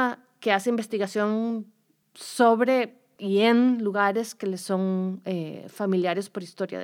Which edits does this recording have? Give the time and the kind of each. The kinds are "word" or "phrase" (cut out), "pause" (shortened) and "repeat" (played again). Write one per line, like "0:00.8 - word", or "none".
none